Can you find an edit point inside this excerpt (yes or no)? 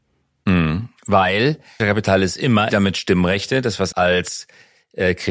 yes